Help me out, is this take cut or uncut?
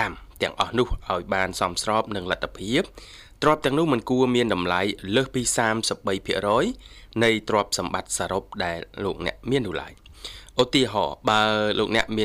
cut